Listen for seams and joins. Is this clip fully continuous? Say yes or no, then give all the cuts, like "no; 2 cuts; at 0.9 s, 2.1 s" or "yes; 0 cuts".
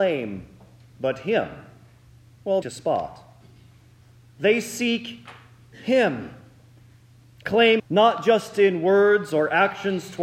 no; 2 cuts; at 2.6 s, 7.8 s